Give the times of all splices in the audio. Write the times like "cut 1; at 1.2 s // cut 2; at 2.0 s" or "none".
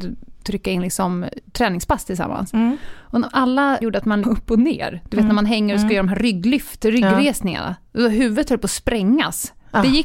cut 1; at 3.8 s // cut 2; at 4.2 s